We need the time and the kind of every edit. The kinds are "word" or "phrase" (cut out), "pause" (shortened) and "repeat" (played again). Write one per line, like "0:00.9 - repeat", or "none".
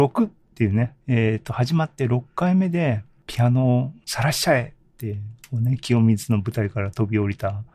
0:01.0 - pause